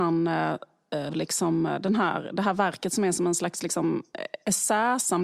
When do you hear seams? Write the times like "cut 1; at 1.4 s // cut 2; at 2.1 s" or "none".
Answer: cut 1; at 1.1 s